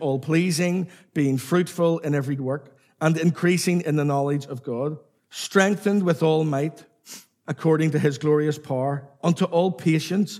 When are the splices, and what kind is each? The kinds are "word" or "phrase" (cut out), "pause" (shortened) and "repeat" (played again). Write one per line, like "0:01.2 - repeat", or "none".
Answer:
0:02.4 - word
0:05.2 - pause